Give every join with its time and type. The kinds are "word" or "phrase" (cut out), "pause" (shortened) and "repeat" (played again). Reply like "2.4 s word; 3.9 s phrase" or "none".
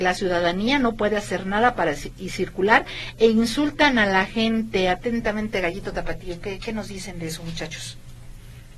none